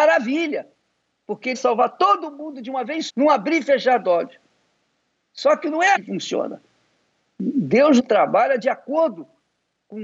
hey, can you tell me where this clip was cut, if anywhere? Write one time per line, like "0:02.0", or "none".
0:01.5
0:03.1
0:06.0
0:08.0